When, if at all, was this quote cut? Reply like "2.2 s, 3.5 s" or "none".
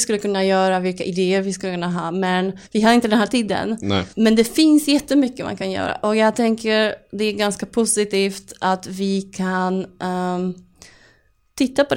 2.7 s, 4.1 s